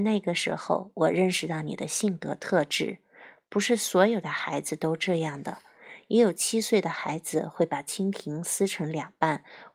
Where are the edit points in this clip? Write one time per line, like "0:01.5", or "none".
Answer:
none